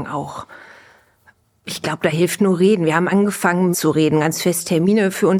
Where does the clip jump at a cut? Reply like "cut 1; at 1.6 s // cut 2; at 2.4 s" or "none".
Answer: cut 1; at 3.7 s